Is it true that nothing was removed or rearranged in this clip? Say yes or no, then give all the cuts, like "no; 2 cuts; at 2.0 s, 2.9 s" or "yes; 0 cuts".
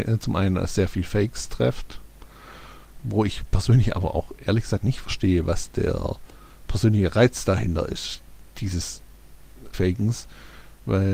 no; 2 cuts; at 3.0 s, 9.7 s